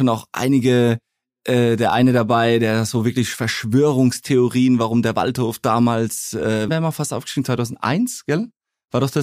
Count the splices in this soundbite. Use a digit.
1